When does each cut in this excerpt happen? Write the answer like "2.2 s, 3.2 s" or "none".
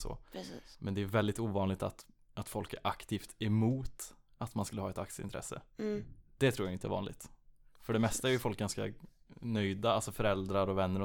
none